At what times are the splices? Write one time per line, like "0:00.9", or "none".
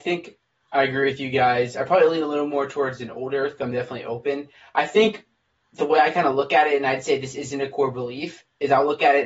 none